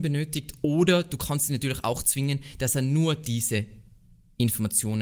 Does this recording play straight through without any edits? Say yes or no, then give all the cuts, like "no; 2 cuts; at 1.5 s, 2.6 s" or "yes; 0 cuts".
yes; 0 cuts